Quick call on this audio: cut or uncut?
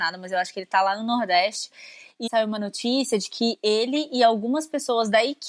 cut